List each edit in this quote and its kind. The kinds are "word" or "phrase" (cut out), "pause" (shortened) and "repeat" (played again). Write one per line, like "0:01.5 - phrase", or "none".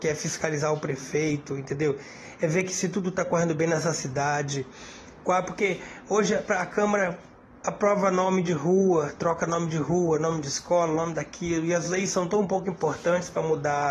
none